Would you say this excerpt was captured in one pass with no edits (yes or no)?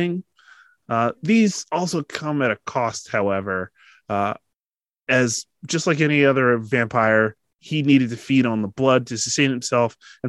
no